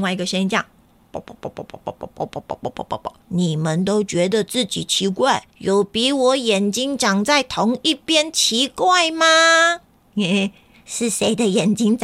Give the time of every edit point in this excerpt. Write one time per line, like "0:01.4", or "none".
0:02.1
0:03.2
0:05.5

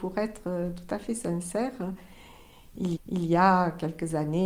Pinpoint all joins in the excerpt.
0:03.0

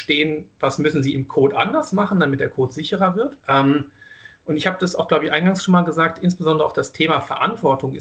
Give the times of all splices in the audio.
0:03.4

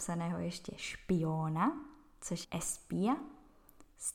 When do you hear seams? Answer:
0:02.4

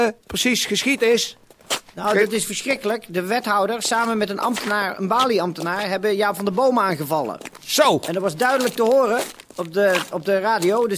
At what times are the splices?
0:09.5

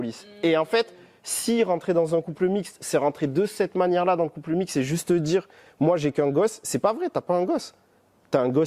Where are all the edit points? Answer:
none

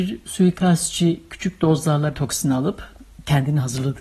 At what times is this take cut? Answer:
0:02.1

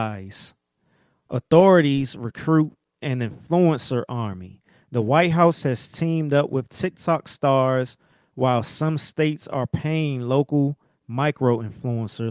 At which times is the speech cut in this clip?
none

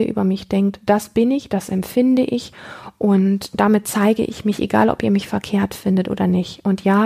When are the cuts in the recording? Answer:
none

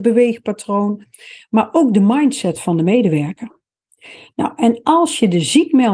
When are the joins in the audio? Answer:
none

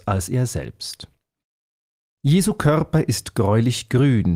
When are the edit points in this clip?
none

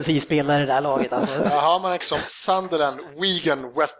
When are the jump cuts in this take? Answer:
0:02.0

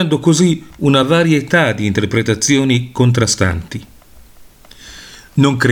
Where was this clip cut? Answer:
none

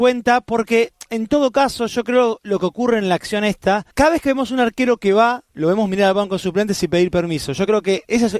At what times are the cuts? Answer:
0:03.9
0:05.5

